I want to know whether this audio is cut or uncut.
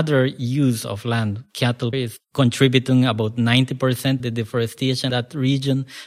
cut